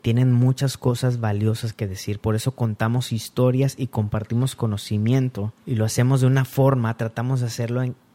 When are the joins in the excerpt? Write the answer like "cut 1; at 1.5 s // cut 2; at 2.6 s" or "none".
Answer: cut 1; at 5.6 s